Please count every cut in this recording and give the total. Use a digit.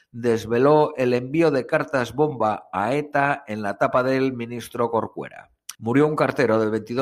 1